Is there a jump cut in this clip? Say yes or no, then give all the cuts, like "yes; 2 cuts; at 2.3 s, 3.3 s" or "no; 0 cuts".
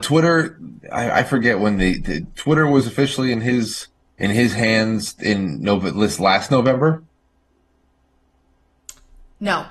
yes; 1 cut; at 4.0 s